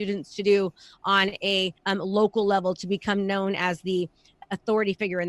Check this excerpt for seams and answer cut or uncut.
cut